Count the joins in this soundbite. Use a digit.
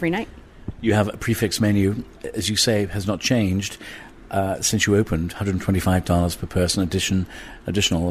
1